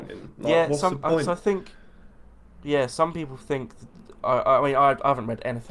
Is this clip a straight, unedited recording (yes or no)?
yes